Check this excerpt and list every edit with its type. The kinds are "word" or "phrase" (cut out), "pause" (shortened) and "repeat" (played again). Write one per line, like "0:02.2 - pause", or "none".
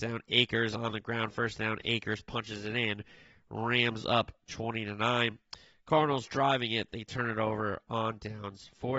none